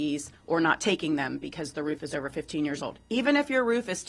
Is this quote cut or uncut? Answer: uncut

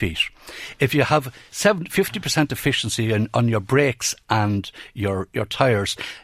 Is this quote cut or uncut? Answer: uncut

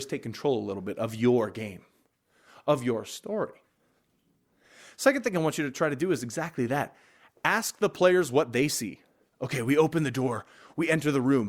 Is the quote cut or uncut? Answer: uncut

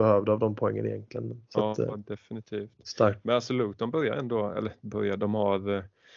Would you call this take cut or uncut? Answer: cut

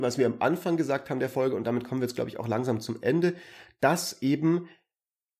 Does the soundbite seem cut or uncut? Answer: uncut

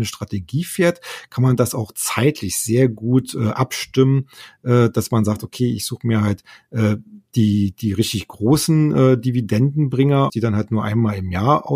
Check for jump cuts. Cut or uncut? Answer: cut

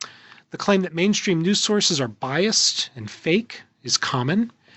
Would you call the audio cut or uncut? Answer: uncut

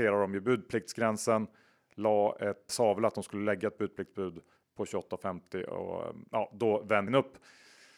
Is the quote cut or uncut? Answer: cut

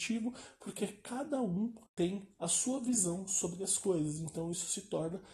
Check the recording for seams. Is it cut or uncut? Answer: cut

